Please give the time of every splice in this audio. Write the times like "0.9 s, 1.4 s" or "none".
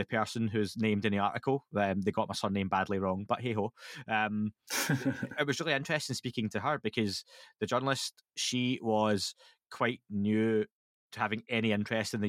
none